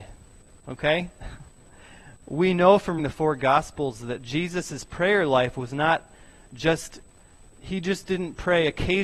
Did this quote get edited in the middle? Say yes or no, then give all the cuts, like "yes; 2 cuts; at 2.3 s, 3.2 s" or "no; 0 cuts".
yes; 2 cuts; at 3.0 s, 7.4 s